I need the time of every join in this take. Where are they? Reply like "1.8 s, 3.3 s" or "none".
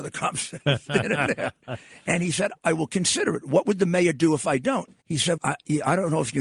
2.6 s, 5.0 s, 5.4 s